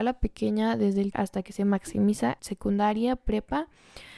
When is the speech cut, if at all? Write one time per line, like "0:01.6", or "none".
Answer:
0:01.1
0:02.4